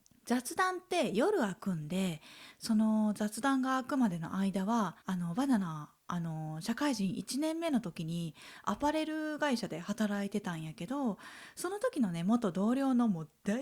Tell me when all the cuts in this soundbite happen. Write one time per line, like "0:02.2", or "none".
0:05.0

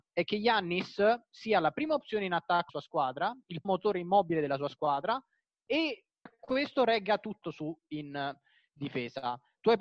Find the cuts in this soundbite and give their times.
0:02.7
0:03.6
0:06.3
0:07.4

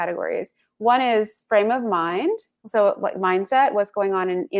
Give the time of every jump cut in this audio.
none

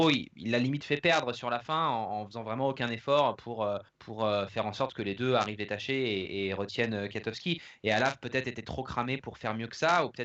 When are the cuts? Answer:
0:03.9

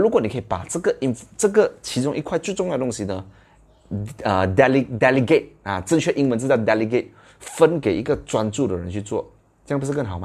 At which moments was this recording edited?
none

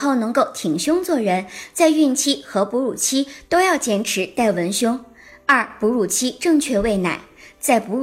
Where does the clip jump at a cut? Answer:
none

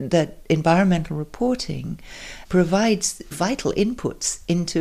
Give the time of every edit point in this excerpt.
0:03.3

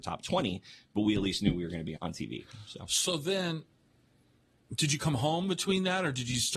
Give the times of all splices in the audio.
0:02.0

